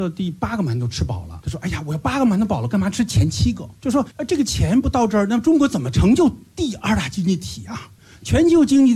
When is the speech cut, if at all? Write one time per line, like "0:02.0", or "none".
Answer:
none